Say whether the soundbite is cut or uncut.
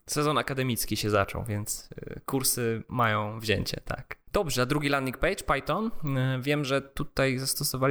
uncut